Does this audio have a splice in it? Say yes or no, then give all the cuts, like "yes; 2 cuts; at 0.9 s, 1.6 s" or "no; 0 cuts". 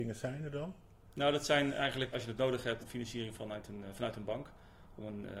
yes; 2 cuts; at 2.1 s, 2.8 s